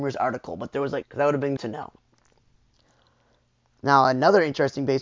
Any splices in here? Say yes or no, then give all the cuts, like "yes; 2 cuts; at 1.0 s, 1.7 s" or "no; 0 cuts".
yes; 2 cuts; at 1.0 s, 1.6 s